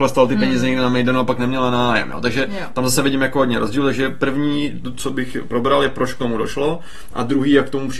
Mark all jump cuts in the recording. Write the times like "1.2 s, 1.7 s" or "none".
none